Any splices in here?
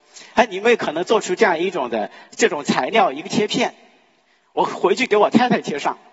no; 0 cuts

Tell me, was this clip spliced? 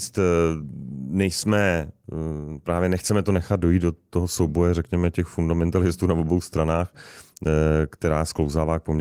no; 0 cuts

